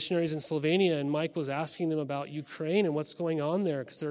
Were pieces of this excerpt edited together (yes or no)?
no